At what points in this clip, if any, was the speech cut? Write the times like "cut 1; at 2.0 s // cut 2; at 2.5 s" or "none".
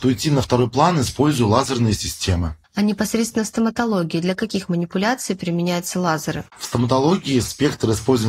cut 1; at 2.6 s // cut 2; at 6.5 s